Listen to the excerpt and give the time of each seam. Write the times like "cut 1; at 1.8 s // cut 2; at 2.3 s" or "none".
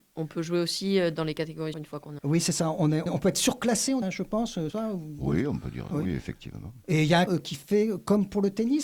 cut 1; at 1.7 s // cut 2; at 2.2 s // cut 3; at 3.1 s // cut 4; at 4.0 s // cut 5; at 4.7 s // cut 6; at 5.9 s // cut 7; at 7.3 s